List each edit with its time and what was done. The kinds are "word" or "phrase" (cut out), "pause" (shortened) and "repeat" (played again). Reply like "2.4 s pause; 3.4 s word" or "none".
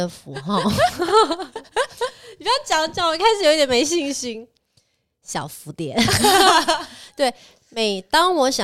none